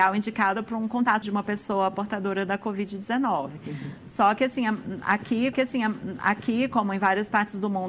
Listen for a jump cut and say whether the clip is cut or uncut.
cut